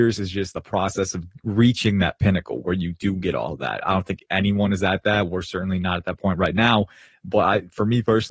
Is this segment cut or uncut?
uncut